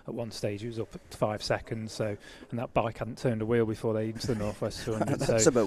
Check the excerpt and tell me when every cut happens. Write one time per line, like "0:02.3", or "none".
0:01.1
0:04.1